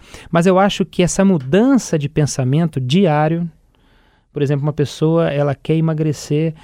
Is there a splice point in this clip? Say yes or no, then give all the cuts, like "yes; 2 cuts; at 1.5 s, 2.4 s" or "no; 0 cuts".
no; 0 cuts